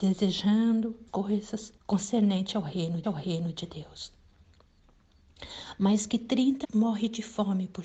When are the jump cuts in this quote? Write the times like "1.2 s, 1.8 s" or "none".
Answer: 1.1 s, 1.8 s, 3.0 s, 6.6 s